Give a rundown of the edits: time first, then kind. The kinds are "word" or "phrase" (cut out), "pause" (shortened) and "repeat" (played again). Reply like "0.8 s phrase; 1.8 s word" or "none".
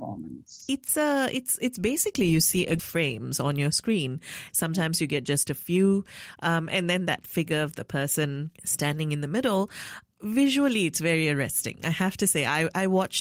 2.8 s phrase; 8.6 s pause